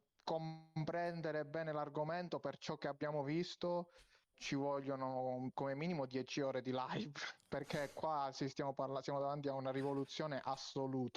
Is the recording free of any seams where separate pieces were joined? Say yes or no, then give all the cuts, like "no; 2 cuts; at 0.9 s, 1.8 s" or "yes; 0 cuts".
no; 1 cut; at 4.3 s